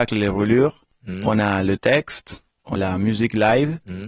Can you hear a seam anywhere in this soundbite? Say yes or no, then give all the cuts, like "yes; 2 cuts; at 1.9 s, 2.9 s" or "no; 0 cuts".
yes; 1 cut; at 2.8 s